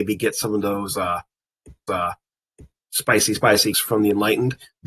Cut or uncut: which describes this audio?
cut